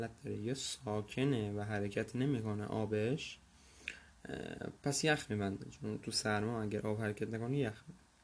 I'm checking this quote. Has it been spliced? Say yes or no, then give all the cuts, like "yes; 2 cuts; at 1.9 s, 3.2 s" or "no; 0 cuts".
no; 0 cuts